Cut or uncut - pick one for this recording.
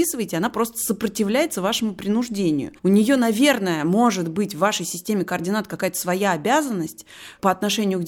cut